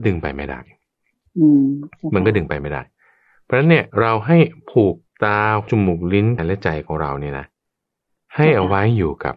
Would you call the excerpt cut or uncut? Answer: cut